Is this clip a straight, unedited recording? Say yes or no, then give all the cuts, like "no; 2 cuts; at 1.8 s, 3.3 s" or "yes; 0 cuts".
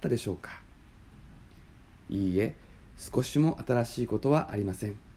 yes; 0 cuts